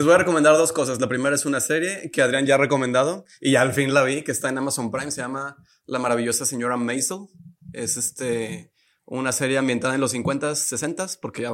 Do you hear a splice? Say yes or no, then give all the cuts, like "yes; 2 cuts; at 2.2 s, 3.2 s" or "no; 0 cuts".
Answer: no; 0 cuts